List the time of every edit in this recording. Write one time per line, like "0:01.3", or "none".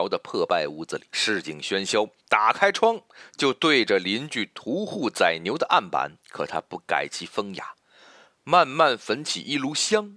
0:01.1
0:02.2
0:06.2